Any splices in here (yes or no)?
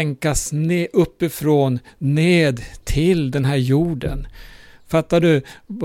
no